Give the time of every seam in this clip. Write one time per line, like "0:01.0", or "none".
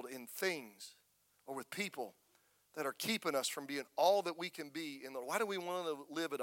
none